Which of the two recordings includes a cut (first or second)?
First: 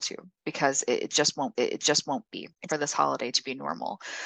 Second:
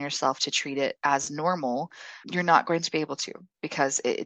first